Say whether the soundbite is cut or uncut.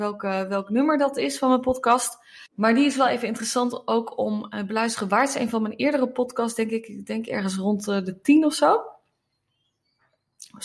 cut